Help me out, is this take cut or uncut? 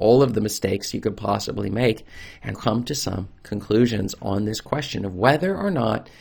cut